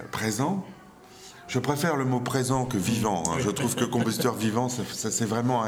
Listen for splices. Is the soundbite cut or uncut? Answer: uncut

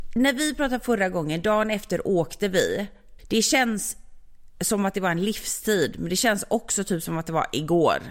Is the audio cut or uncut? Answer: cut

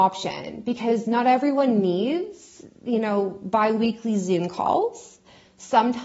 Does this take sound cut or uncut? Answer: uncut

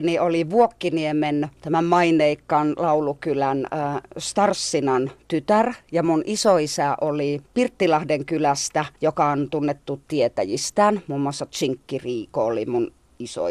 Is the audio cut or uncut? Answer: cut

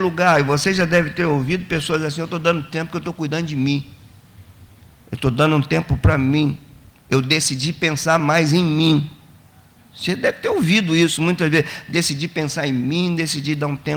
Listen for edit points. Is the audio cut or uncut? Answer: uncut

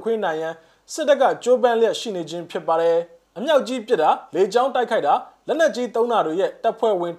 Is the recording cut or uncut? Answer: cut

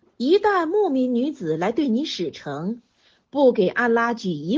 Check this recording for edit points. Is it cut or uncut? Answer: uncut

